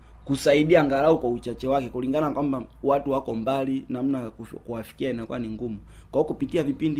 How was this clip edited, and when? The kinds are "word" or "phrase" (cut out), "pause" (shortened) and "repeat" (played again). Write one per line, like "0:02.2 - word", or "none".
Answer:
none